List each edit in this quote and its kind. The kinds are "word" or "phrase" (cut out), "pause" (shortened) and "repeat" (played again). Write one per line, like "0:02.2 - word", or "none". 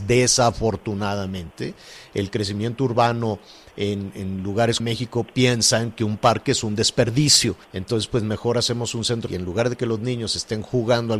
0:04.8 - phrase
0:07.6 - pause
0:09.3 - word